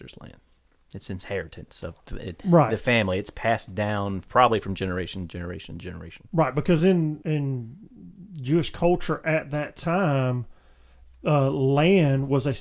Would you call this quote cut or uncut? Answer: uncut